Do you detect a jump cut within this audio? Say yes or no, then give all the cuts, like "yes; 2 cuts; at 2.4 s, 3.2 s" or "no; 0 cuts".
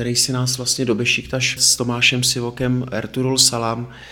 yes; 1 cut; at 1.6 s